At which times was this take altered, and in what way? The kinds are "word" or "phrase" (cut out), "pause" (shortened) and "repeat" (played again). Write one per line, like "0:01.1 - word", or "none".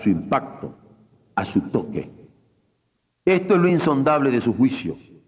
none